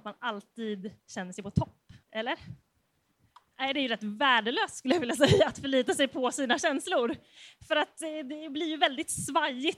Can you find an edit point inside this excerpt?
yes; 2 cuts; at 1.0 s, 2.0 s

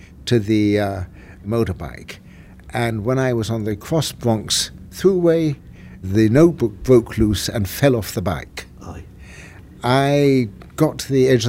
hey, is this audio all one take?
yes; 0 cuts

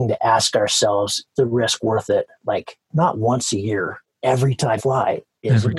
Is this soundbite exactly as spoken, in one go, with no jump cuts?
no; 3 cuts; at 1.4 s, 4.1 s, 4.8 s

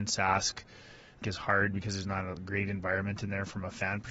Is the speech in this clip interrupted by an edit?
yes; 1 cut; at 1.2 s

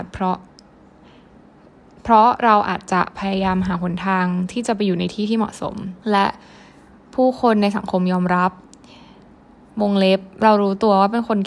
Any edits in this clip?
yes; 1 cut; at 6.0 s

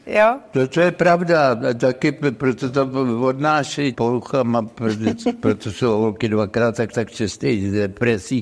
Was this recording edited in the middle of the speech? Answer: yes; 2 cuts; at 3.9 s, 6.9 s

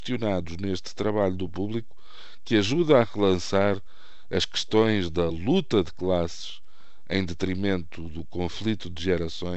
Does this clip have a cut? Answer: no; 0 cuts

